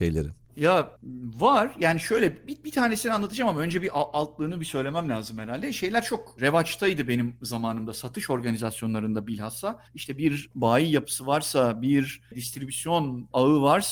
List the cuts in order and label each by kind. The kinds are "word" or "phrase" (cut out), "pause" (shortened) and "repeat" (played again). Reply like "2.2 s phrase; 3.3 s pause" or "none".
9.9 s pause